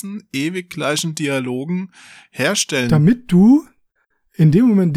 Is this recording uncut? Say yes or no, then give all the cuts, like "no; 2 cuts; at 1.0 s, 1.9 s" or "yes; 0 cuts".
yes; 0 cuts